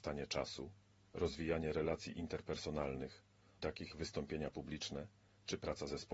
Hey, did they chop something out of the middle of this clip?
yes; 2 cuts; at 3.6 s, 3.9 s

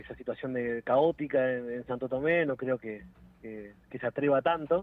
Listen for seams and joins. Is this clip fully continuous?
yes; 0 cuts

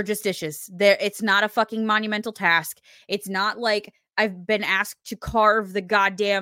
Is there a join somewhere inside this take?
no; 0 cuts

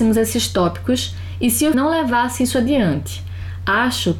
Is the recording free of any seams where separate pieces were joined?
no; 1 cut; at 1.7 s

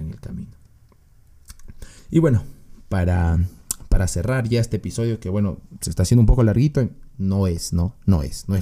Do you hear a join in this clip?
yes; 1 cut; at 2.0 s

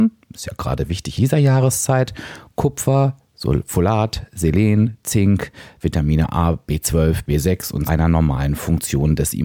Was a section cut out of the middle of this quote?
yes; 2 cuts; at 1.2 s, 7.9 s

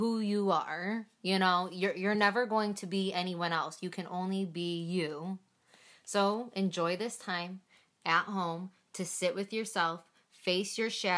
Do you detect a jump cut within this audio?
no; 0 cuts

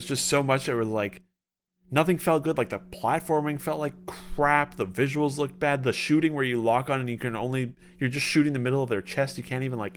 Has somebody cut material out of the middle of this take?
no; 0 cuts

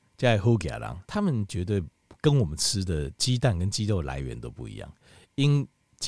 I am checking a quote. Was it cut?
yes; 1 cut; at 1.0 s

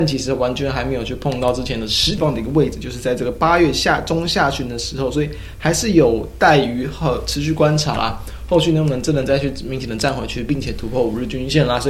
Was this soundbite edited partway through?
yes; 1 cut; at 2.2 s

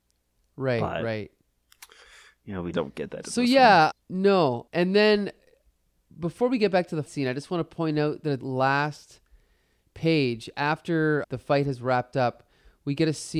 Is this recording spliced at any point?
yes; 6 cuts; at 2.7 s, 3.9 s, 4.7 s, 7.1 s, 8.4 s, 11.2 s

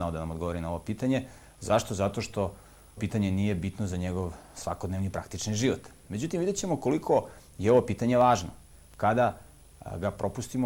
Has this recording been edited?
yes; 1 cut; at 3.0 s

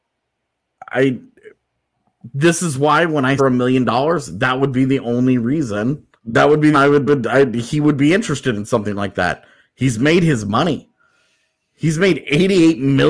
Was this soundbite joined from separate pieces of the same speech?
yes; 4 cuts; at 3.4 s, 6.2 s, 6.7 s, 7.1 s

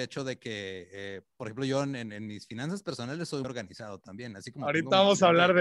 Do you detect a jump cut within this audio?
yes; 1 cut; at 3.4 s

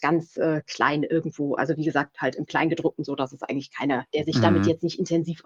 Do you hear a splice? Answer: no; 0 cuts

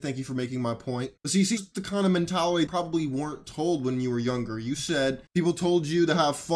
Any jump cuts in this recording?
yes; 4 cuts; at 1.2 s, 1.6 s, 2.7 s, 5.3 s

